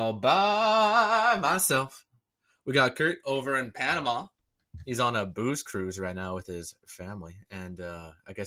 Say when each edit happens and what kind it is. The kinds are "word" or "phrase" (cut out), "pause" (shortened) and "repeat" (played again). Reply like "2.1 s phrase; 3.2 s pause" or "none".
none